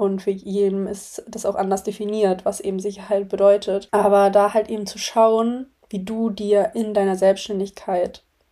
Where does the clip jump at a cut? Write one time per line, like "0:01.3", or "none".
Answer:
0:05.8